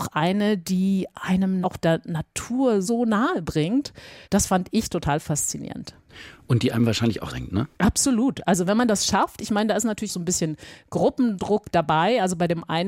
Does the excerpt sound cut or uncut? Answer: cut